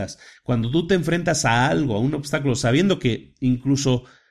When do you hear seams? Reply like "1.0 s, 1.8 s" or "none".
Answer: none

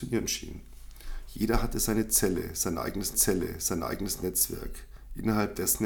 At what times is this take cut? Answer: 3.1 s

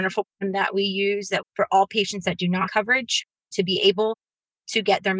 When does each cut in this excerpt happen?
1.4 s, 2.7 s

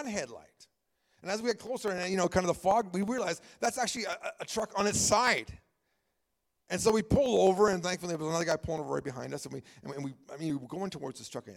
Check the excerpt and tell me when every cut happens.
none

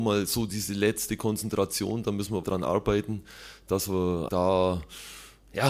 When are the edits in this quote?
2.4 s, 4.3 s

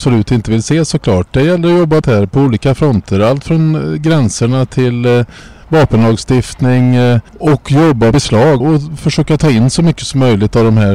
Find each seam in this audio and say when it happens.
2.0 s, 7.3 s, 8.1 s, 8.6 s

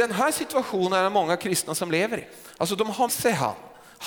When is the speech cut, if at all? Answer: 3.1 s

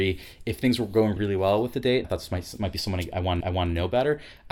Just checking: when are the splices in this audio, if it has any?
1.2 s, 2.0 s, 3.4 s

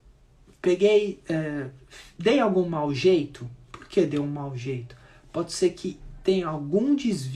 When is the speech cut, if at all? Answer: none

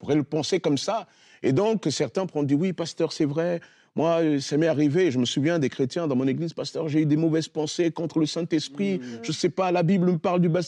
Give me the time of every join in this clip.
none

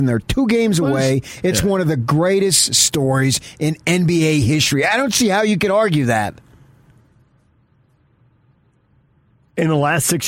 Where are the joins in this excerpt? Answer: none

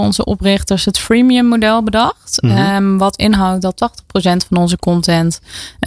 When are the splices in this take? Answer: none

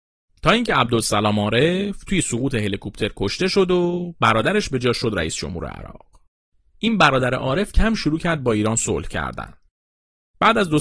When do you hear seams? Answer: 7.7 s

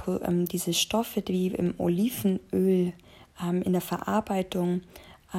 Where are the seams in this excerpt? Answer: none

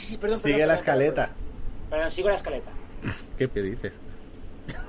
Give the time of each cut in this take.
3.5 s

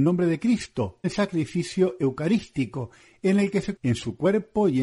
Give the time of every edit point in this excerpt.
1.0 s, 3.8 s

